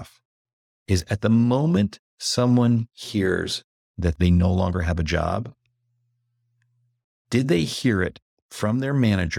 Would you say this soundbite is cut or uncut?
uncut